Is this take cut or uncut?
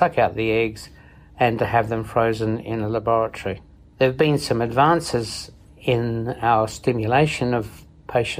uncut